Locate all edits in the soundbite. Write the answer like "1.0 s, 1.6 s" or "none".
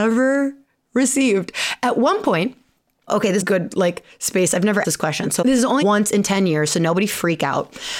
3.1 s, 3.4 s, 4.8 s, 5.4 s, 5.8 s